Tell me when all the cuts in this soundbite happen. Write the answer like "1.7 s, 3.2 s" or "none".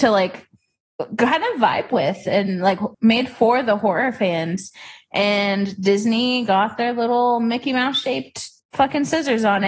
2.9 s, 8.6 s